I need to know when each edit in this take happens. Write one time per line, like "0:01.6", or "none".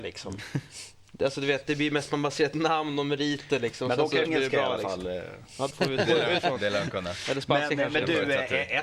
0:04.3
0:05.7
0:06.4